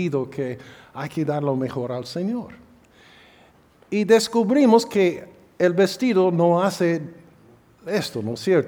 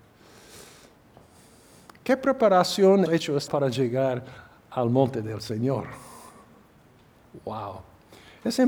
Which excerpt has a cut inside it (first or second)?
second